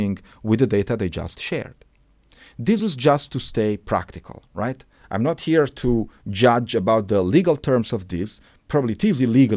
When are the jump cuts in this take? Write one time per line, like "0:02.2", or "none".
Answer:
none